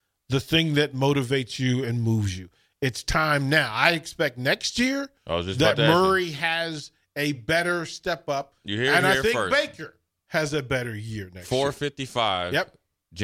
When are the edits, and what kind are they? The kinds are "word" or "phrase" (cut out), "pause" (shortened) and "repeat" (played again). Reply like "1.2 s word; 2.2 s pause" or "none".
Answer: none